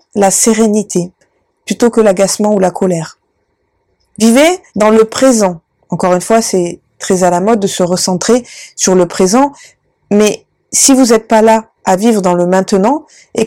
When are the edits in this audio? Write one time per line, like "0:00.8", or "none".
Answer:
0:04.7
0:05.7
0:11.7